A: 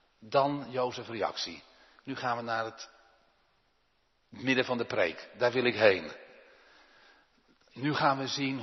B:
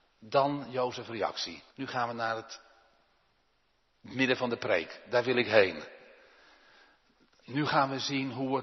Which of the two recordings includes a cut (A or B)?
B